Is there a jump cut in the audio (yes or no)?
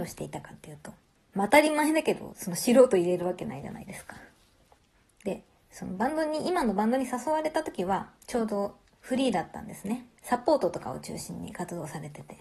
yes